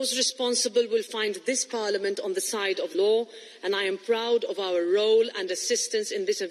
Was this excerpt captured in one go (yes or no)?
no